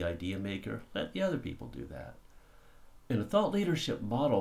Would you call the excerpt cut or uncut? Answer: cut